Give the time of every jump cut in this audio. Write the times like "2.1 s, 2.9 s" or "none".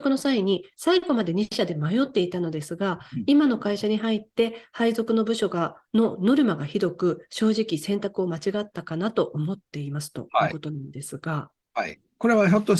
5.9 s